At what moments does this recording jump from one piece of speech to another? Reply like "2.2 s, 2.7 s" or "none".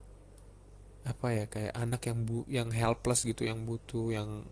none